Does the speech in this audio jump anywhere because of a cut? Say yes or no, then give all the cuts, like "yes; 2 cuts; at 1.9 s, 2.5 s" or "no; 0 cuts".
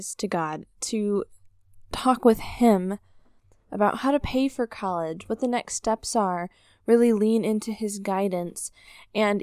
no; 0 cuts